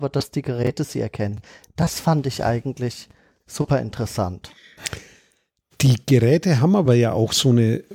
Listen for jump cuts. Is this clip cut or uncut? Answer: uncut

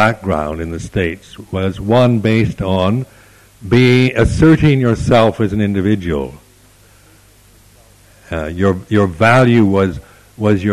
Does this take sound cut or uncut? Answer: uncut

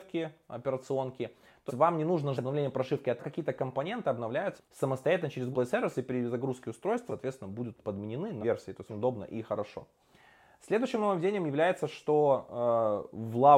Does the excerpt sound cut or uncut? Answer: cut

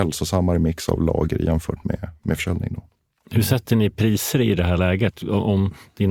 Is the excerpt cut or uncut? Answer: uncut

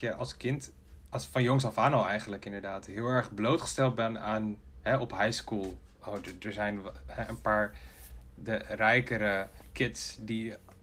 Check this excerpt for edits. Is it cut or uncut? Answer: cut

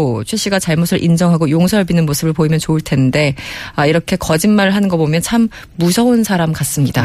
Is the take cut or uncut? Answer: uncut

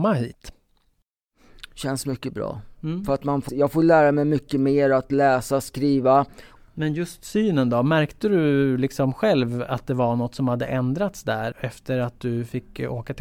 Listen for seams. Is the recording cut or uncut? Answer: cut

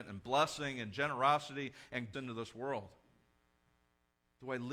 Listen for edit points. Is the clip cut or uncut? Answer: cut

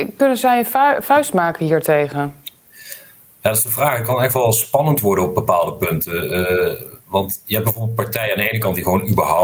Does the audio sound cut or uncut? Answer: uncut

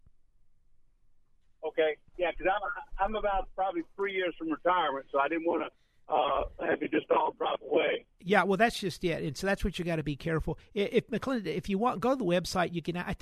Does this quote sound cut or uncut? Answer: uncut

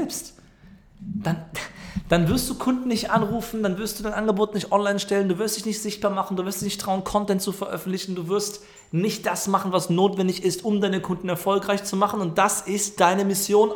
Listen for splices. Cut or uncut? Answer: uncut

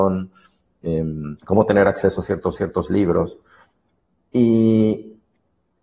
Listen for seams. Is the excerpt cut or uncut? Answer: cut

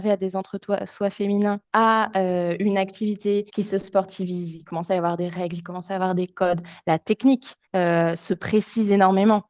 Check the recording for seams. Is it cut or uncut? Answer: cut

